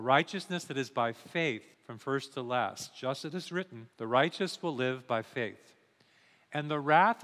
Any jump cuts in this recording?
yes; 2 cuts; at 1.7 s, 3.9 s

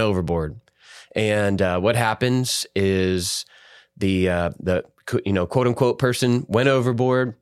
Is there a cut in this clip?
no; 0 cuts

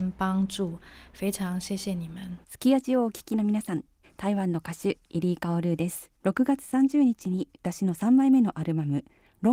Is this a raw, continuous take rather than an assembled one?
no; 3 cuts; at 2.4 s, 4.0 s, 6.1 s

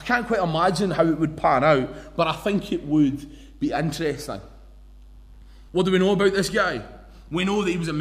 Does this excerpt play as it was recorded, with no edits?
no; 1 cut; at 5.7 s

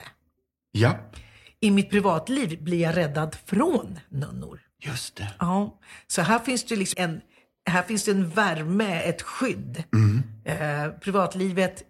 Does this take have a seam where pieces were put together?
yes; 1 cut; at 6.9 s

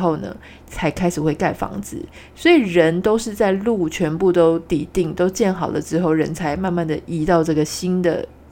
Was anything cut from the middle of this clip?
no; 0 cuts

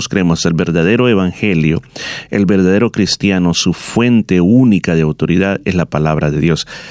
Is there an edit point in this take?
no; 0 cuts

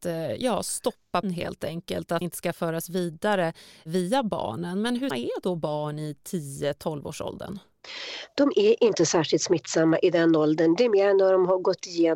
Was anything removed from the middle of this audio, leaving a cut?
yes; 3 cuts; at 1.2 s, 2.2 s, 5.1 s

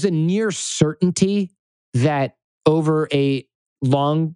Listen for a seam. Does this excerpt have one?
no; 0 cuts

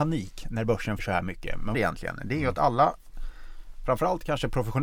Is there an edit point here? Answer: yes; 2 cuts; at 1.0 s, 1.7 s

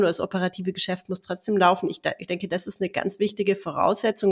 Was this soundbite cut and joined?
no; 0 cuts

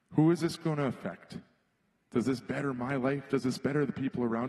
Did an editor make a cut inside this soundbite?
no; 0 cuts

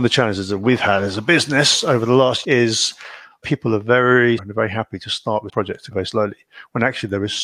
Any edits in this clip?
yes; 5 cuts; at 2.4 s, 3.4 s, 4.4 s, 5.5 s, 5.9 s

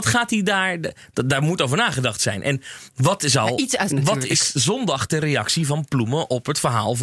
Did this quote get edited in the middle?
yes; 1 cut; at 3.9 s

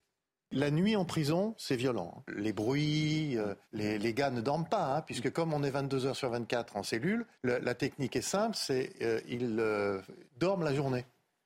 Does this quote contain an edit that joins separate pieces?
yes; 3 cuts; at 3.6 s, 7.3 s, 10.3 s

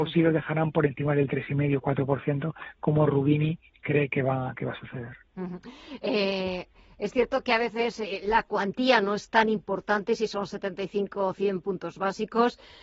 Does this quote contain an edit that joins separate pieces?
no; 0 cuts

